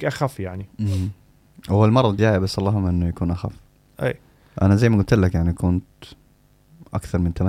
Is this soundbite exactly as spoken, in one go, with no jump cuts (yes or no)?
no